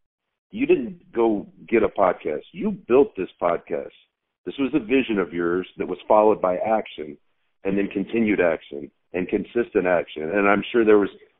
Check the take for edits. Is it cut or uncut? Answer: uncut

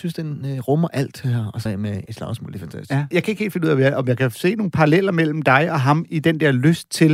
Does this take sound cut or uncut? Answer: cut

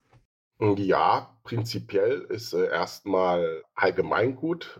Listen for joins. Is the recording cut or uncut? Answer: cut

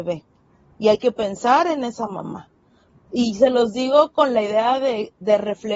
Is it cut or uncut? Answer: uncut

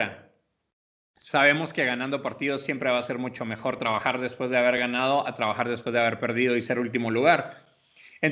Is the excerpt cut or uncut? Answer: uncut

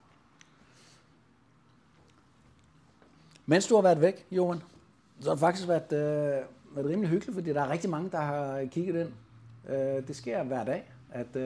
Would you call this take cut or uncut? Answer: uncut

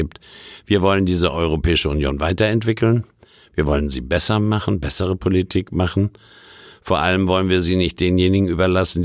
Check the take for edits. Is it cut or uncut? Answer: uncut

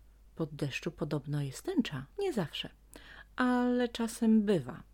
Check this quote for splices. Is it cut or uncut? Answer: cut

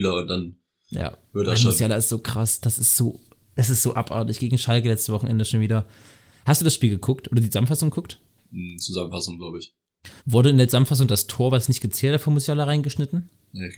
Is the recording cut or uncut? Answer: cut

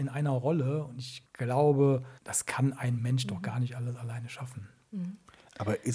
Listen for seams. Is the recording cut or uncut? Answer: cut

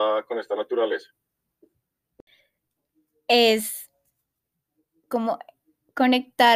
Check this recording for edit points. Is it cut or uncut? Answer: uncut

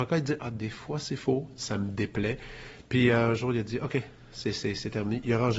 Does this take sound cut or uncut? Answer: uncut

